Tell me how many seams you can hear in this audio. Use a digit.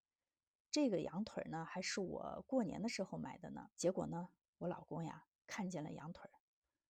1